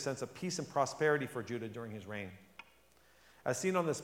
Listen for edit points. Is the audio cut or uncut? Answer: uncut